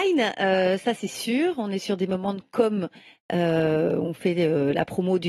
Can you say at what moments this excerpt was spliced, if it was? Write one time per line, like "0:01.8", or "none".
none